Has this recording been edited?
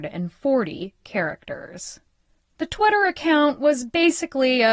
no; 0 cuts

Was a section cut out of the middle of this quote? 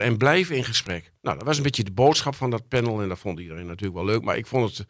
yes; 1 cut; at 1.2 s

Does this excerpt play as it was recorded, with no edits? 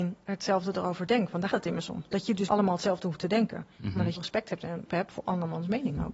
no; 4 cuts; at 1.5 s, 2.5 s, 4.2 s, 4.9 s

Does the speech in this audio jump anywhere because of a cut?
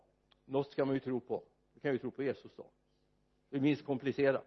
no; 0 cuts

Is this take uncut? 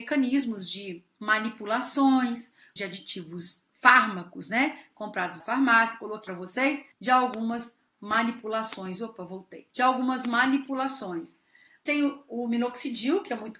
no; 7 cuts; at 2.8 s, 3.7 s, 5.4 s, 6.3 s, 6.9 s, 9.7 s, 11.9 s

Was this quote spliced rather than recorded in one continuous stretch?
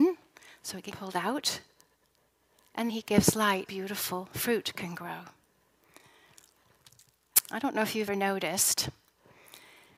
yes; 4 cuts; at 0.9 s, 2.9 s, 3.7 s, 8.1 s

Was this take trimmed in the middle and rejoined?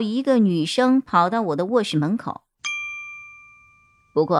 no; 0 cuts

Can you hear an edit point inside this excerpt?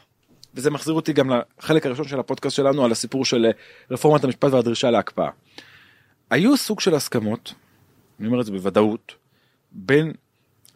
no; 0 cuts

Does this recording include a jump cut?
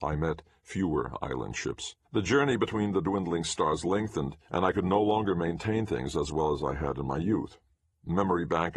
yes; 2 cuts; at 2.0 s, 4.4 s

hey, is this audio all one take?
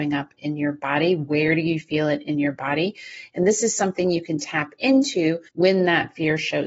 no; 1 cut; at 5.5 s

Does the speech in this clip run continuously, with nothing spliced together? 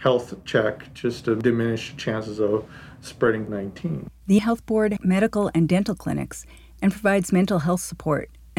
no; 3 cuts; at 3.5 s, 4.4 s, 5.0 s

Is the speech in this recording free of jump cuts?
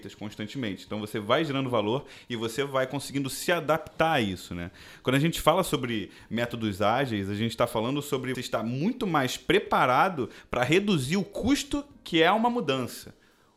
no; 1 cut; at 8.3 s

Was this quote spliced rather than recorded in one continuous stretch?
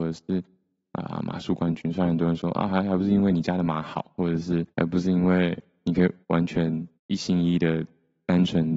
yes; 3 cuts; at 4.7 s, 6.2 s, 6.9 s

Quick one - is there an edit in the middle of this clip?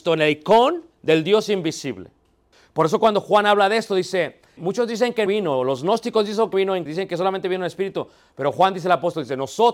yes; 6 cuts; at 0.9 s, 2.5 s, 4.6 s, 5.3 s, 6.5 s, 6.9 s

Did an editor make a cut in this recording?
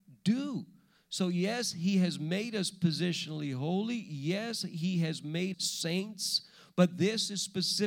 yes; 1 cut; at 5.5 s

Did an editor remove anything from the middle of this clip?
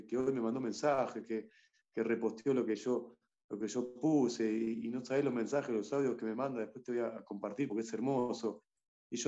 no; 0 cuts

